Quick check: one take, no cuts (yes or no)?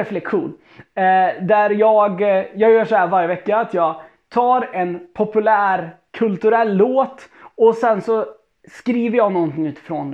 yes